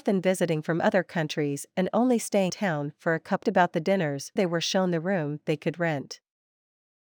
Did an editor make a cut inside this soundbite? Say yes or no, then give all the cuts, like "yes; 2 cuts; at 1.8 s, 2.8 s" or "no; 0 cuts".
yes; 3 cuts; at 2.5 s, 3.4 s, 4.4 s